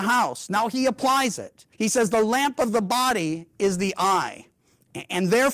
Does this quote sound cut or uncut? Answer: cut